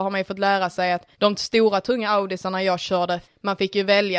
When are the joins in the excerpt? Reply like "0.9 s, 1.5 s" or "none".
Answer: 1.1 s, 3.2 s

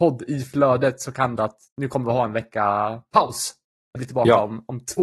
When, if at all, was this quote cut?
1.4 s, 1.7 s, 4.0 s

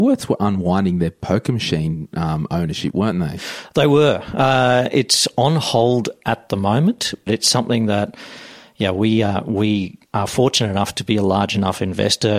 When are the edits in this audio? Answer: 7.3 s, 10.1 s

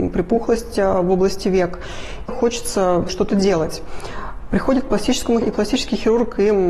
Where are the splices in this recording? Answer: 2.3 s, 3.1 s, 5.4 s

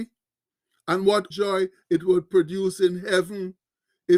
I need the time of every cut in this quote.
1.3 s

